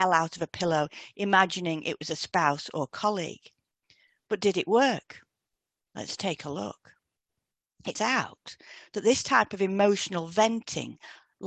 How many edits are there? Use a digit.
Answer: 1